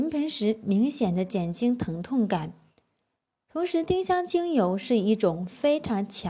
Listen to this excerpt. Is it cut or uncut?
uncut